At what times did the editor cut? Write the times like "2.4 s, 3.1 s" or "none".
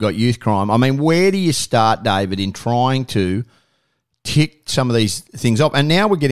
none